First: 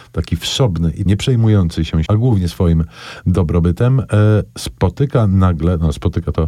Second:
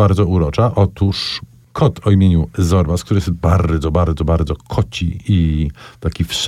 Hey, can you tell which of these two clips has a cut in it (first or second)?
first